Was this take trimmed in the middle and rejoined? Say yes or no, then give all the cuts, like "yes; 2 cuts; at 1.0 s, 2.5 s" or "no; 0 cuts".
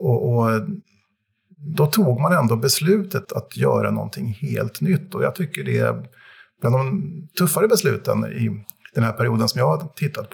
yes; 1 cut; at 3.2 s